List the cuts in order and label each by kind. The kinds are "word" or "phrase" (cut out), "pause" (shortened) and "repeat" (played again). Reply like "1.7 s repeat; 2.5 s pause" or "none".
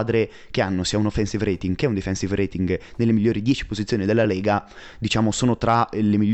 none